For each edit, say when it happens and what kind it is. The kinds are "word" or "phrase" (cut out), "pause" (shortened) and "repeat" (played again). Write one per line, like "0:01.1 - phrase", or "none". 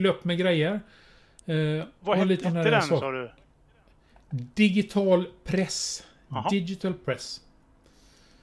0:02.0 - word
0:02.4 - word